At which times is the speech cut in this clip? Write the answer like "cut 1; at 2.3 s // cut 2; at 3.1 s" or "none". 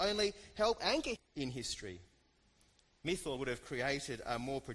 cut 1; at 1.2 s // cut 2; at 3.4 s